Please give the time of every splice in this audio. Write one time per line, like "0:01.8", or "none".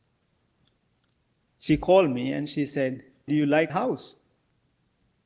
0:03.3
0:03.7